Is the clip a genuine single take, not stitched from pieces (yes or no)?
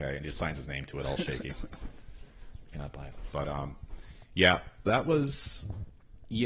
no